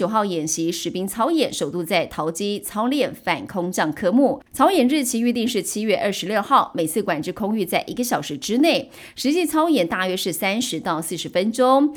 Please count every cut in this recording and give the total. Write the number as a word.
one